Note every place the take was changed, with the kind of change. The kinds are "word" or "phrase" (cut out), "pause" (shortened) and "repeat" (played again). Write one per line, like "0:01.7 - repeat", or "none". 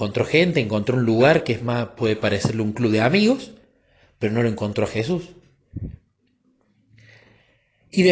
none